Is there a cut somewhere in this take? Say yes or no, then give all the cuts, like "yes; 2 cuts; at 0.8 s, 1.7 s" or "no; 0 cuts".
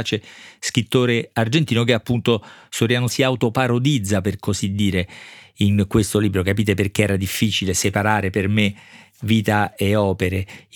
yes; 1 cut; at 3.1 s